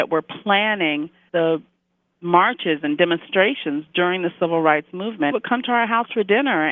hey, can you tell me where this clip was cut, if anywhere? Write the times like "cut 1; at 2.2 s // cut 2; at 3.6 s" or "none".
cut 1; at 1.3 s // cut 2; at 5.3 s

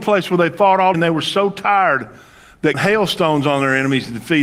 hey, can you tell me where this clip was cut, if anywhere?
cut 1; at 0.9 s // cut 2; at 2.7 s

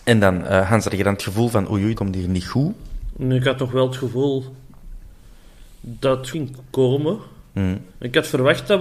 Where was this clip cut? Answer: cut 1; at 2.0 s // cut 2; at 6.3 s // cut 3; at 7.9 s

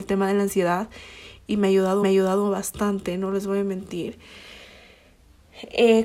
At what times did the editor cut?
cut 1; at 2.0 s

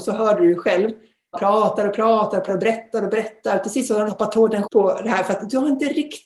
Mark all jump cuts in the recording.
cut 1; at 1.3 s // cut 2; at 2.5 s // cut 3; at 4.1 s // cut 4; at 4.6 s

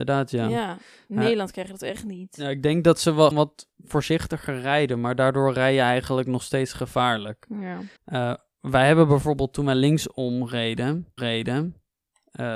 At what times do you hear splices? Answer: cut 1; at 3.3 s // cut 2; at 8.0 s // cut 3; at 11.2 s

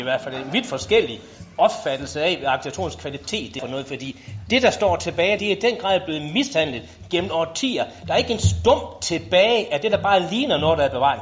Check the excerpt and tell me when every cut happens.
cut 1; at 3.6 s // cut 2; at 5.4 s

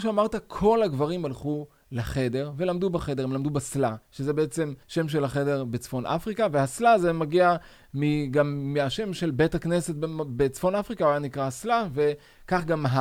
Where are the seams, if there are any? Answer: cut 1; at 4.0 s // cut 2; at 4.8 s

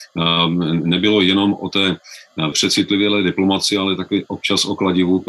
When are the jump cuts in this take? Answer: cut 1; at 2.5 s

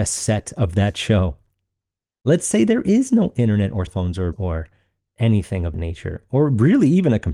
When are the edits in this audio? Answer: cut 1; at 3.9 s // cut 2; at 4.3 s // cut 3; at 5.7 s

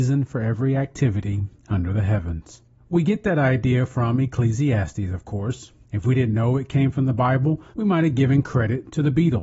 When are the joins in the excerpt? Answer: cut 1; at 2.8 s // cut 2; at 5.8 s // cut 3; at 7.7 s

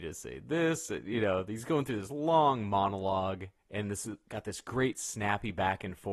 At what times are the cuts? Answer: none

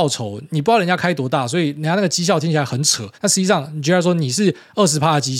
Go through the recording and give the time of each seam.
cut 1; at 3.1 s

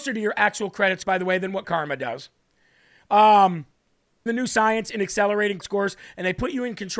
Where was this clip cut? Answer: cut 1; at 1.0 s // cut 2; at 1.6 s // cut 3; at 4.3 s // cut 4; at 5.6 s

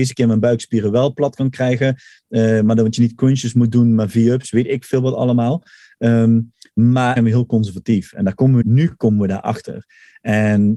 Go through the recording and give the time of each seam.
cut 1; at 7.2 s // cut 2; at 8.6 s

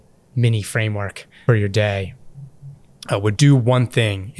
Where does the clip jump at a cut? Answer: cut 1; at 1.5 s // cut 2; at 3.4 s

